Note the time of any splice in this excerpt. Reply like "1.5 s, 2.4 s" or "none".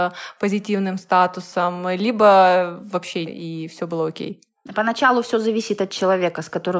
3.3 s